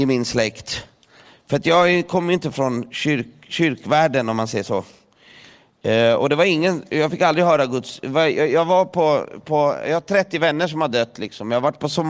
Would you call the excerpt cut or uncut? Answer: uncut